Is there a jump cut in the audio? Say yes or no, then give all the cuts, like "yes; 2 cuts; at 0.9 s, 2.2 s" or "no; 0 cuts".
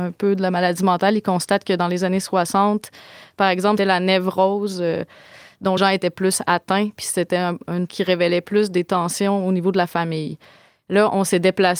yes; 3 cuts; at 3.8 s, 5.8 s, 7.9 s